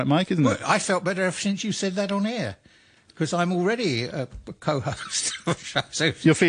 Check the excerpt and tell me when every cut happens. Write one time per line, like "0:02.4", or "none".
none